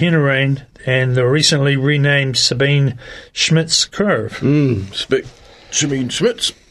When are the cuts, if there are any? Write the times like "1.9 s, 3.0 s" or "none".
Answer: none

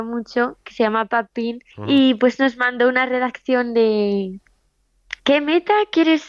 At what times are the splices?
1.7 s, 5.2 s

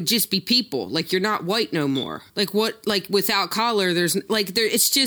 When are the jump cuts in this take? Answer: 2.3 s

